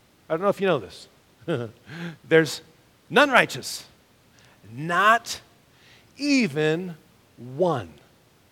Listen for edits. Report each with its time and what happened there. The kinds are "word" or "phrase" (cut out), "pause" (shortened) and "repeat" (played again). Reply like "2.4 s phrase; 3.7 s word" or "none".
none